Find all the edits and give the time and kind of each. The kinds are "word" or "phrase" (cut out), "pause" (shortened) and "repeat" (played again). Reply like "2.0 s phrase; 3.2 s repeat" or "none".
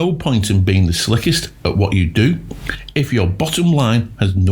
none